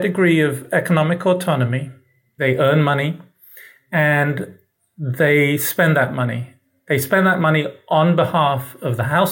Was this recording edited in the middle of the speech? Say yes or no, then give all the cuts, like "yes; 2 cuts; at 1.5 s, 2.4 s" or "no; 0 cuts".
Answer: no; 0 cuts